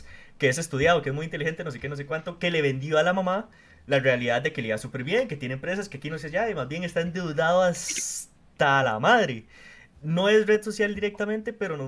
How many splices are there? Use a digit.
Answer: 0